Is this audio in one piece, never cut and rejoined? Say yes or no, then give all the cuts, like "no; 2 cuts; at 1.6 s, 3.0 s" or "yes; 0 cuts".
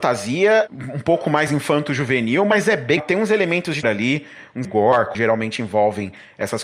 no; 4 cuts; at 3.0 s, 3.8 s, 4.6 s, 5.1 s